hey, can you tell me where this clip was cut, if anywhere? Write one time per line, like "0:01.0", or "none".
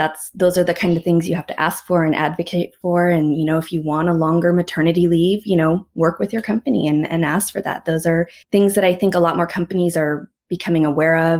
0:08.4